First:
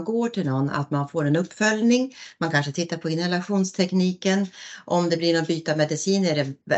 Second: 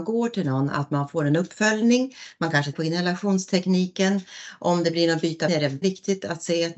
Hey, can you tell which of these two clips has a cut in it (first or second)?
second